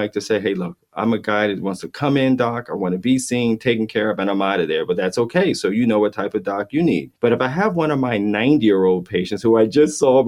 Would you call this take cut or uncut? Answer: cut